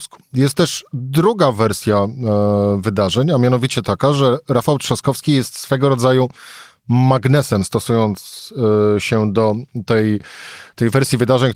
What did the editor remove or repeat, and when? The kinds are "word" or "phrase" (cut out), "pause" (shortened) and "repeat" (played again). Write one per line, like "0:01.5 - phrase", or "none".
none